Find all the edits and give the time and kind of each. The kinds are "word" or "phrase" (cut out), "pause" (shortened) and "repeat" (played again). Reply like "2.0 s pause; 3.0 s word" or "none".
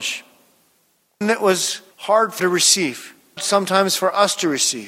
1.2 s word; 1.9 s pause; 2.4 s word; 3.4 s word